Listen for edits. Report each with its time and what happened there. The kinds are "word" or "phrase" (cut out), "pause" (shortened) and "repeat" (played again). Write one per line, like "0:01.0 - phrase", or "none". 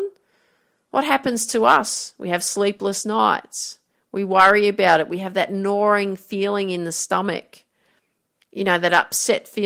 none